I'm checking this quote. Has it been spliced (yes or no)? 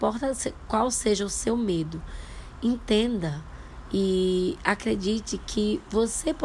no